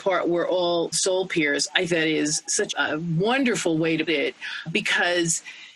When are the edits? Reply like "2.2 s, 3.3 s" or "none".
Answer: 0.9 s, 1.9 s, 2.7 s, 4.1 s, 4.7 s